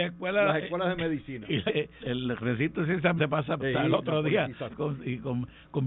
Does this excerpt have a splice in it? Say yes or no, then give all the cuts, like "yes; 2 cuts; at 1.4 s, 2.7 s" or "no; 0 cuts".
yes; 5 cuts; at 1.7 s, 2.0 s, 3.2 s, 3.6 s, 4.7 s